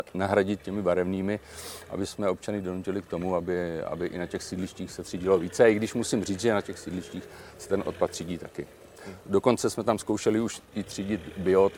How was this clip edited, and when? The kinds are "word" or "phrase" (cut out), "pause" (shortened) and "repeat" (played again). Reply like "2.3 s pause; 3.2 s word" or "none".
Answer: none